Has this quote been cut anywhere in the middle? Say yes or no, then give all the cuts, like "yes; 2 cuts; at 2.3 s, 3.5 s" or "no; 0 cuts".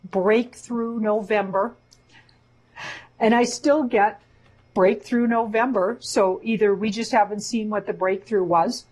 no; 0 cuts